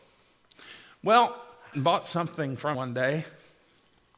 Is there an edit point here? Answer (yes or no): yes